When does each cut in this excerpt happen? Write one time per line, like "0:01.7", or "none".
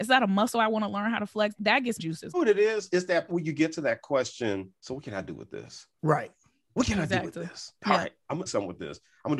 0:01.6
0:02.0
0:02.3
0:02.9
0:03.3
0:04.8
0:05.9
0:08.5